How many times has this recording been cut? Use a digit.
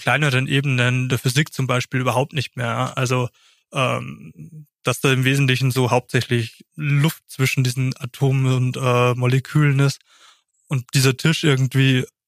0